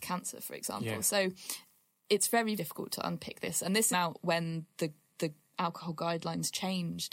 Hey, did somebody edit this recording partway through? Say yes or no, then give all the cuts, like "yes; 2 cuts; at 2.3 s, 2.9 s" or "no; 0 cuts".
yes; 3 cuts; at 2.6 s, 3.9 s, 5.1 s